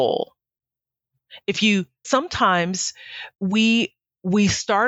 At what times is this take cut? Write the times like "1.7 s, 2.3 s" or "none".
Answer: 2.0 s